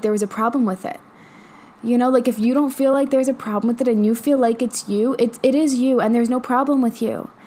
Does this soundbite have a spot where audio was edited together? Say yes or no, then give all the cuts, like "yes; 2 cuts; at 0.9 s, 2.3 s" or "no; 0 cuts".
no; 0 cuts